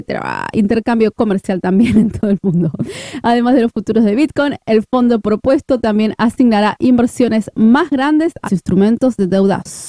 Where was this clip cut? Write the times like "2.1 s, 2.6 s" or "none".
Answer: 8.4 s